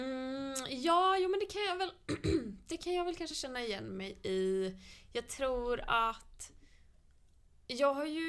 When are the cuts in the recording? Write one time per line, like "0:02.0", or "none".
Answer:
none

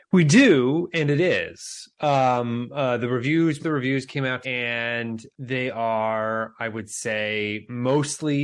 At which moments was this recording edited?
0:03.6
0:04.4
0:05.3

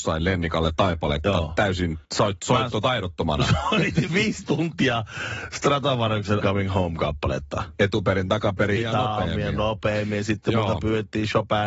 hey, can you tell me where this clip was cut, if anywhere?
0:02.0
0:04.1
0:06.4
0:08.8

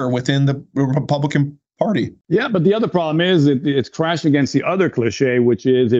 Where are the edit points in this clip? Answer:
none

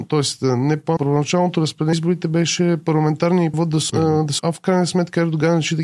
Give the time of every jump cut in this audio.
0:01.0
0:01.9
0:03.5
0:03.9
0:04.4

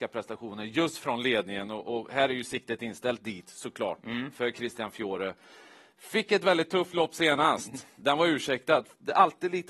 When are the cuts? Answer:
none

